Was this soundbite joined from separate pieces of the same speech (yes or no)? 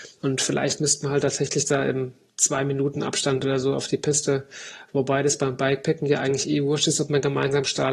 no